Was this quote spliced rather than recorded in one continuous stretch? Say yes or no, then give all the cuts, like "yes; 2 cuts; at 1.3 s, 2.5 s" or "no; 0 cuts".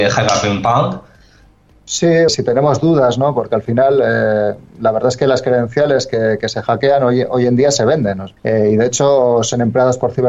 yes; 2 cuts; at 2.3 s, 8.4 s